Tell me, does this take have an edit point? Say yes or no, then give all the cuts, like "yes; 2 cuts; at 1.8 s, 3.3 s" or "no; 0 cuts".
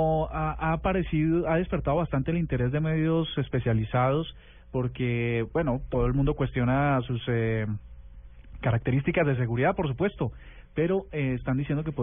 no; 0 cuts